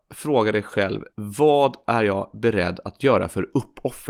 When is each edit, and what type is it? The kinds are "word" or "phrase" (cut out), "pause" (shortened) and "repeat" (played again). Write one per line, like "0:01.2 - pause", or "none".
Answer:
0:01.1 - pause

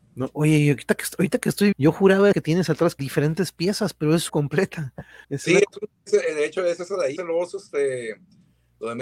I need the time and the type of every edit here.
0:01.7 - word
0:02.3 - word
0:03.0 - word
0:04.3 - word
0:05.2 - pause
0:07.2 - word

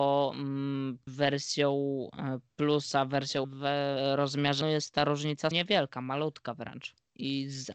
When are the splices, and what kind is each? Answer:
0:01.1 - word
0:03.4 - word
0:04.6 - word
0:05.5 - word

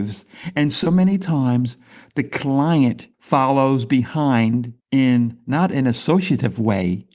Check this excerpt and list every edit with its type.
0:03.1 - pause
0:04.8 - pause

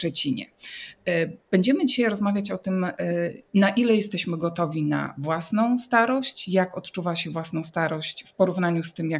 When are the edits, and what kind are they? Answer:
0:03.5 - pause

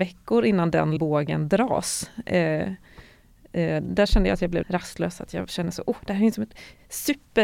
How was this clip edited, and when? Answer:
0:01.0 - word
0:04.6 - word

